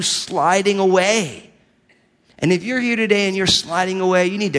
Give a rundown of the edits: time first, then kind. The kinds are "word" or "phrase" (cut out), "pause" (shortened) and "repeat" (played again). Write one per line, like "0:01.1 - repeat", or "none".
none